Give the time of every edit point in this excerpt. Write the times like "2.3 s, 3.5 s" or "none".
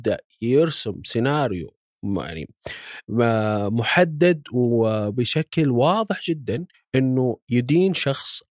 6.7 s